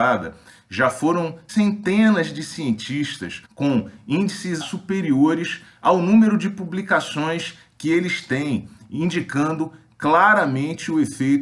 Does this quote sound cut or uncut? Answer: cut